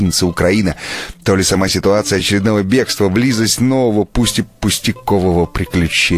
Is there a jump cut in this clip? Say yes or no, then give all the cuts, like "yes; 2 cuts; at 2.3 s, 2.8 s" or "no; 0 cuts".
no; 0 cuts